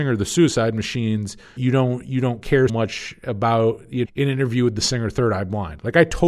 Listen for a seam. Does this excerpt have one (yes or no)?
yes